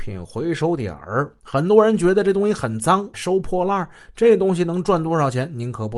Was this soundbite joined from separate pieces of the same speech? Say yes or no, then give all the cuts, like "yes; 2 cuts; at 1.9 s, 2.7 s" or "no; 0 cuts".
yes; 2 cuts; at 1.4 s, 3.1 s